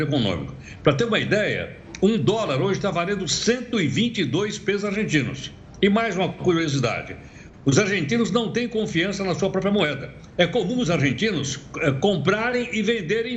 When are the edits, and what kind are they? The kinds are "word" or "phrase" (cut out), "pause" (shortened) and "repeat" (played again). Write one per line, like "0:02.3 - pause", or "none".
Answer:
none